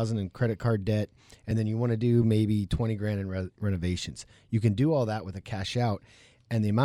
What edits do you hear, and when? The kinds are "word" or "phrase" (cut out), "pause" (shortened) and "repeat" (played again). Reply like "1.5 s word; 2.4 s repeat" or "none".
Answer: none